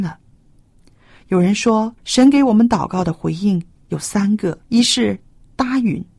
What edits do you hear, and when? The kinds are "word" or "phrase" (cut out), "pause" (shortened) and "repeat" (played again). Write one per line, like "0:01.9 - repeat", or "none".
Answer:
0:02.0 - pause
0:04.6 - pause